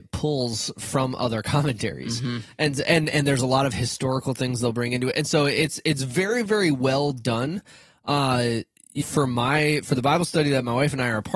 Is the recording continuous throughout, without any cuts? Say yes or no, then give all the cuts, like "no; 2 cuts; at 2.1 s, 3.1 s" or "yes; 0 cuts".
no; 1 cut; at 9.0 s